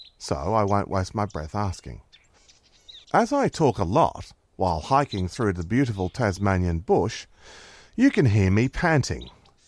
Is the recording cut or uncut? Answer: cut